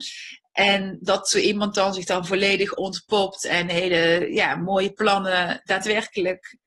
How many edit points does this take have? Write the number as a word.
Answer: zero